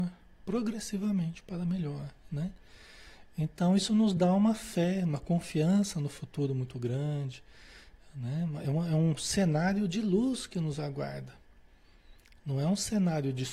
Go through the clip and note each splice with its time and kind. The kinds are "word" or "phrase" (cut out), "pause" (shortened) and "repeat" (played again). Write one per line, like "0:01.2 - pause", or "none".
none